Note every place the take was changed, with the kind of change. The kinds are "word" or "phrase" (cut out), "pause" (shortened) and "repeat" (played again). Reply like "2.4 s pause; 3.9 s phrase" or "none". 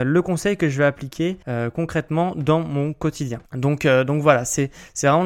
1.4 s pause; 3.5 s pause